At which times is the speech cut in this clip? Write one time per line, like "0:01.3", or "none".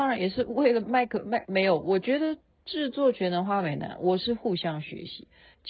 none